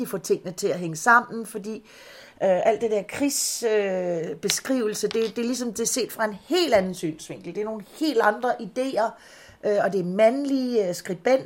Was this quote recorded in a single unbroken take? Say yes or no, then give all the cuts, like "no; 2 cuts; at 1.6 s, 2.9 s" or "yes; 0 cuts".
yes; 0 cuts